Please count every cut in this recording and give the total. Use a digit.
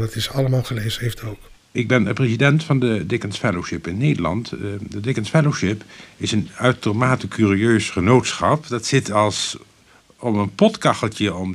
0